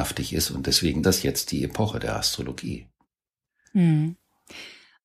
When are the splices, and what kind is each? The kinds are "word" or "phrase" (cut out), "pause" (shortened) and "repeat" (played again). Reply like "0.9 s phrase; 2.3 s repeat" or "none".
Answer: 1.0 s word